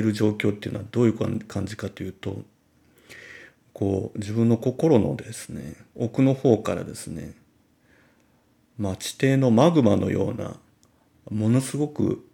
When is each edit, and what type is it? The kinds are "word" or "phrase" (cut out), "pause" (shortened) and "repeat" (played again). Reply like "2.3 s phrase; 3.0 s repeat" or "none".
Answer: none